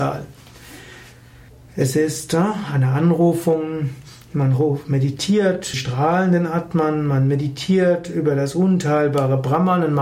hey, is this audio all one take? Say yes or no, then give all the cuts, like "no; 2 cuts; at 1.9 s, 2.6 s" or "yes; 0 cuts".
no; 2 cuts; at 1.5 s, 5.7 s